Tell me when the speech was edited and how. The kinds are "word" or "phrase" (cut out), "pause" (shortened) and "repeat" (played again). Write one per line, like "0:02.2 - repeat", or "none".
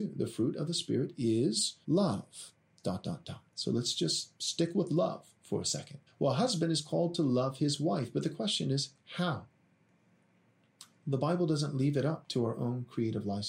0:01.8 - pause
0:03.5 - pause
0:06.1 - pause